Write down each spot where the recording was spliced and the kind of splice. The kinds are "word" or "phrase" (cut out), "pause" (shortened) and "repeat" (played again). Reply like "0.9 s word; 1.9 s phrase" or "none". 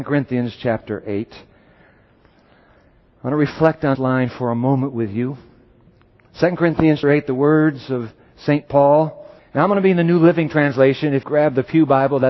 3.9 s word; 7.0 s word; 9.4 s pause; 11.2 s word